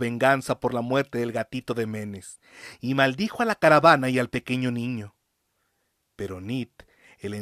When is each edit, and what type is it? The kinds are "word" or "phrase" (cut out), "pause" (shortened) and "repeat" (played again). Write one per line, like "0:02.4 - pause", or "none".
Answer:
none